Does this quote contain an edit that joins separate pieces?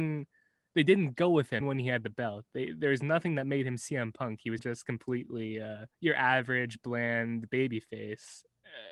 yes; 3 cuts; at 1.6 s, 4.6 s, 5.9 s

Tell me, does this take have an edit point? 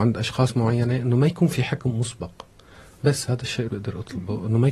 yes; 1 cut; at 3.7 s

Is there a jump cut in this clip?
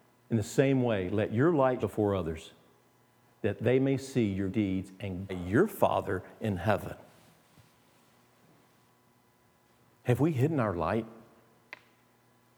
yes; 3 cuts; at 1.8 s, 4.5 s, 5.3 s

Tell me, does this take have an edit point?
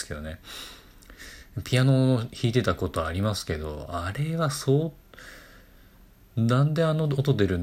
no; 0 cuts

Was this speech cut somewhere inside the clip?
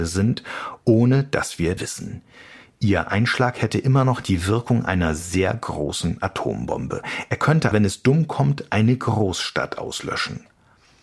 yes; 2 cuts; at 1.8 s, 7.7 s

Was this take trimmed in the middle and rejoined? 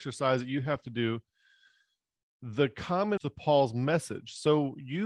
yes; 1 cut; at 3.2 s

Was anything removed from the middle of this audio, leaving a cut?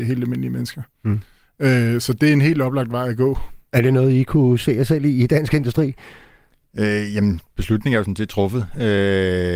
no; 0 cuts

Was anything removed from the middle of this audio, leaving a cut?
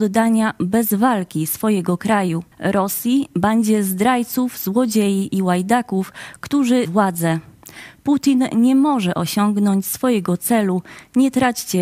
yes; 2 cuts; at 2.5 s, 6.8 s

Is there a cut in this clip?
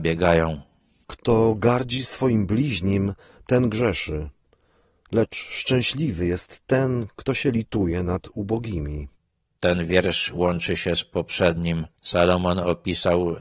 no; 0 cuts

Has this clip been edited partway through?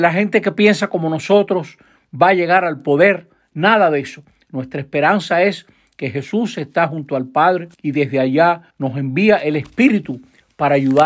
yes; 2 cuts; at 7.7 s, 8.7 s

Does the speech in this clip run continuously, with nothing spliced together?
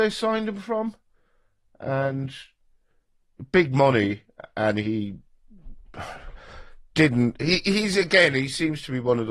yes; 0 cuts

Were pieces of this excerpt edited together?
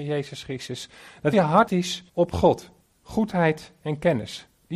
yes; 4 cuts; at 1.3 s, 1.7 s, 2.1 s, 2.8 s

